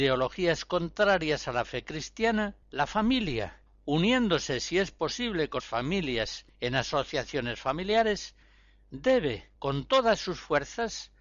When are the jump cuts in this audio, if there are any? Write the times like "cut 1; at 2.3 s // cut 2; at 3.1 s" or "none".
cut 1; at 2.6 s // cut 2; at 3.7 s // cut 3; at 5.6 s // cut 4; at 9.6 s